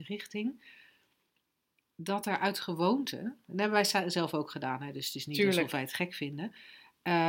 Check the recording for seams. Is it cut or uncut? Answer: uncut